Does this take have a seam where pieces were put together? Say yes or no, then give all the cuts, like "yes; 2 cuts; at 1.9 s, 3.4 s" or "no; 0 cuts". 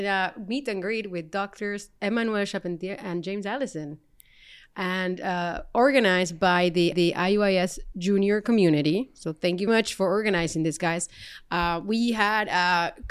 yes; 2 cuts; at 6.9 s, 9.7 s